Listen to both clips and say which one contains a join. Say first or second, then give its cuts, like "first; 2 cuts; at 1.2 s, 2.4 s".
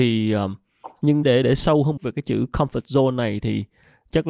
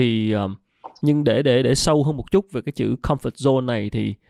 first; 2 cuts; at 1.2 s, 2.0 s